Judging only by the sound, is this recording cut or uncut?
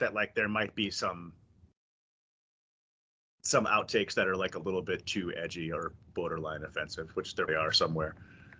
cut